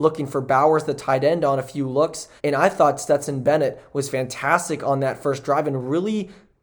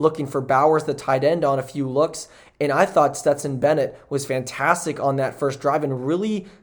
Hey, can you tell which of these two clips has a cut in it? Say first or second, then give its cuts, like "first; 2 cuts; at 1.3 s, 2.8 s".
first; 1 cut; at 2.4 s